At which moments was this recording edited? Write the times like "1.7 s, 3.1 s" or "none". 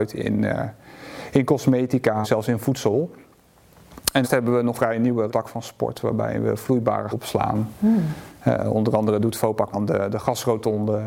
2.2 s, 4.2 s, 4.7 s, 5.3 s, 7.1 s, 9.2 s, 9.7 s